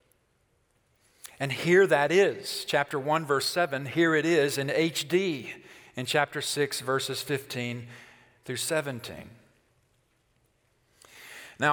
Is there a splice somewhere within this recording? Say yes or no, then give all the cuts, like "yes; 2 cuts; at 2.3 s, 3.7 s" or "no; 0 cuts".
no; 0 cuts